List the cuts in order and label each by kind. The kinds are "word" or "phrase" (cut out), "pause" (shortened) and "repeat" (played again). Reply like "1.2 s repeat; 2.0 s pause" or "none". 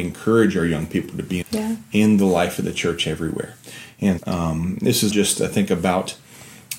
1.4 s word; 4.2 s word; 5.1 s word